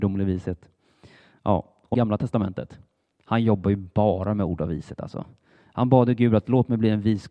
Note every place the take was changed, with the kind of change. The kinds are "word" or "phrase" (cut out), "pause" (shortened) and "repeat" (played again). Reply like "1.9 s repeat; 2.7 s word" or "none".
1.9 s phrase